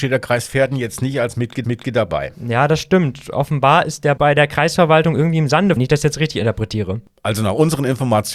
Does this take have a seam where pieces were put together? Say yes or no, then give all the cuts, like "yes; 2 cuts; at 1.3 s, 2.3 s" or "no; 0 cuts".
yes; 3 cuts; at 1.6 s, 4.2 s, 5.8 s